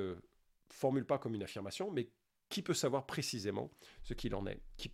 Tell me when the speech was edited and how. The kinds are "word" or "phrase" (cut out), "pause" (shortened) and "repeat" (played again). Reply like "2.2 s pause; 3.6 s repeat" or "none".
none